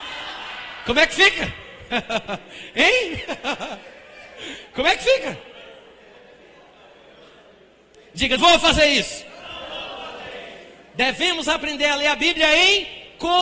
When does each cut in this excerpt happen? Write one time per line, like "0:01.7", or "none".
0:08.4